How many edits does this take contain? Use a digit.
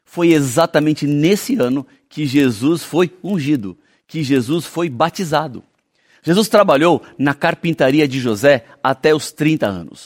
0